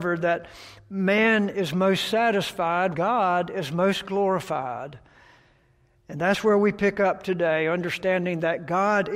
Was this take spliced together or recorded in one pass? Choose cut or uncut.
cut